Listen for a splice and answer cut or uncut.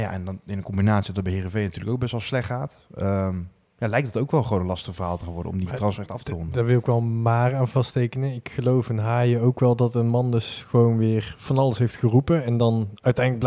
uncut